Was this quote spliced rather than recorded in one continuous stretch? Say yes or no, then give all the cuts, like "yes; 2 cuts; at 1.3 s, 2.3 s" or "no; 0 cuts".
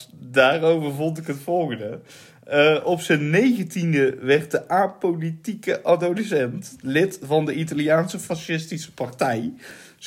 no; 0 cuts